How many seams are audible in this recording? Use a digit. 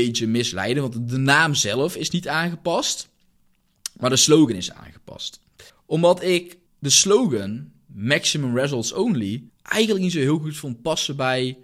3